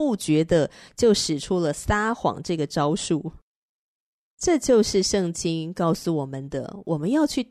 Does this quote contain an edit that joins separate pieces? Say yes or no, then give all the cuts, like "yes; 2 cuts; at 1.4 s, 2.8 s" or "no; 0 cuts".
no; 0 cuts